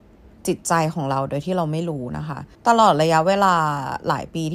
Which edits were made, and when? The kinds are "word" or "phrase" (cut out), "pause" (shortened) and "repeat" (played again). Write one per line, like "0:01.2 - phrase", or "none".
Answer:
0:02.5 - pause